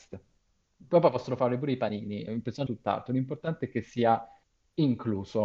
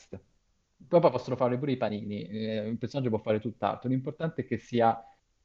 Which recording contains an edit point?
first; 2 cuts; at 2.3 s, 2.7 s

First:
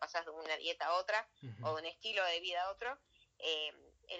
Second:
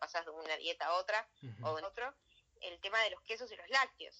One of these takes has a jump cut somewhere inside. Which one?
second; 2 cuts; at 1.8 s, 2.5 s

